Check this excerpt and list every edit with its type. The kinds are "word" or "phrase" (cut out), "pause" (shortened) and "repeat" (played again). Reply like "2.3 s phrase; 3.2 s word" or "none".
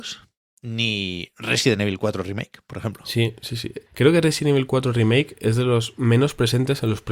3.9 s pause